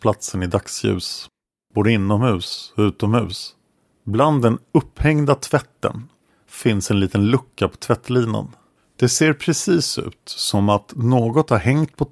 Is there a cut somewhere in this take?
no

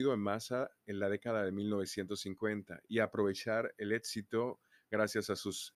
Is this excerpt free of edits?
yes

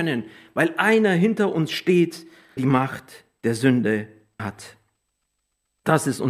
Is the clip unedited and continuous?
no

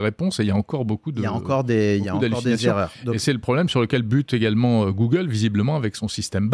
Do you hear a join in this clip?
no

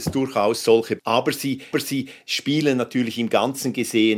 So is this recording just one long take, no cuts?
no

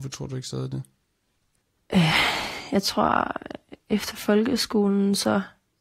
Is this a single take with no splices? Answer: yes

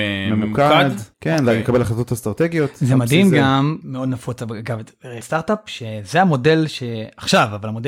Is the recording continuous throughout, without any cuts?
no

